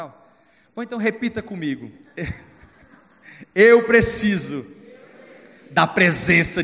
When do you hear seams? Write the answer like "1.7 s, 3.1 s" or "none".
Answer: none